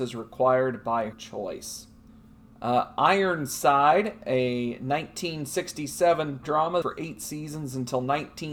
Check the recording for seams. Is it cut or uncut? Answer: cut